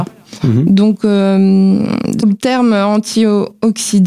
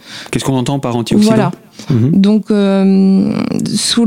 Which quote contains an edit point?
first; 1 cut; at 2.2 s

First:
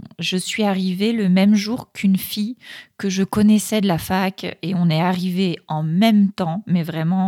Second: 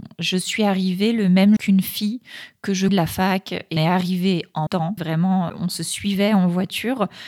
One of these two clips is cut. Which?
second; 6 cuts; at 1.6 s, 2.9 s, 3.8 s, 4.7 s, 5.0 s, 5.5 s

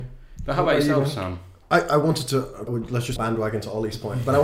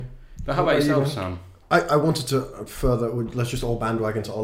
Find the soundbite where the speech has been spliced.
first; 2 cuts; at 2.7 s, 3.2 s

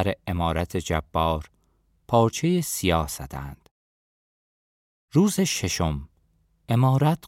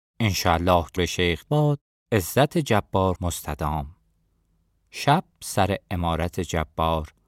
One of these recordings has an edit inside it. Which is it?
second; 5 cuts; at 1.0 s, 1.4 s, 1.8 s, 3.2 s, 5.3 s

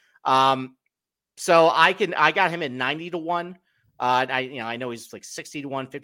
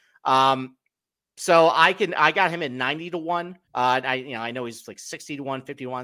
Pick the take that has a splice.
second; 1 cut; at 3.6 s

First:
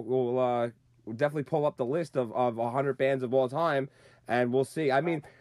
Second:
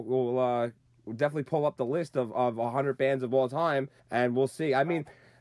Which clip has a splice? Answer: second; 1 cut; at 4.0 s

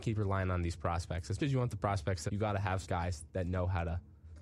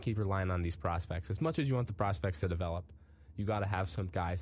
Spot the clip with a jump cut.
first; 3 cuts; at 1.4 s, 2.3 s, 2.8 s

